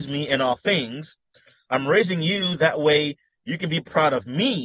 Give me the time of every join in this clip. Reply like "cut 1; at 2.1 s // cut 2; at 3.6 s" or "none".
none